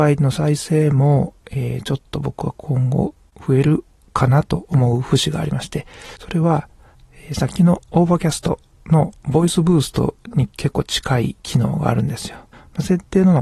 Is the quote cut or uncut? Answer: cut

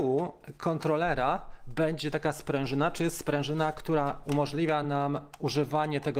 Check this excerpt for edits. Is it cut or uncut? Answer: uncut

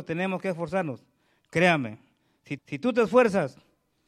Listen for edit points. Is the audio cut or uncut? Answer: cut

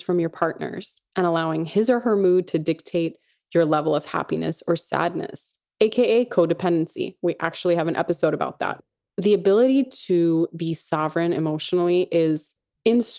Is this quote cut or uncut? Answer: uncut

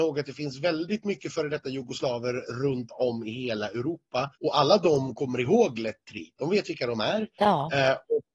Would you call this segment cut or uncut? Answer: cut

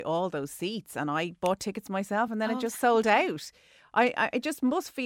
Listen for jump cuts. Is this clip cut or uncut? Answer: uncut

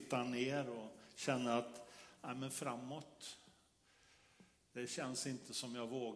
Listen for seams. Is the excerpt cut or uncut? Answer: uncut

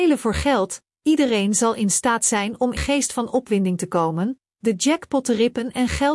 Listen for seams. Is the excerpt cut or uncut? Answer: cut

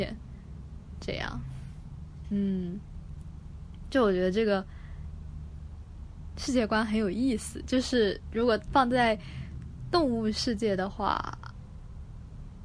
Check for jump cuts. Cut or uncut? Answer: uncut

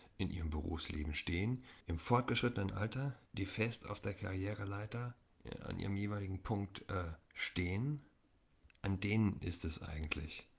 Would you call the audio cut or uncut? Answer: cut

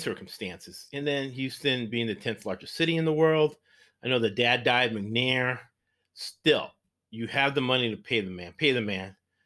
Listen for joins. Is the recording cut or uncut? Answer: uncut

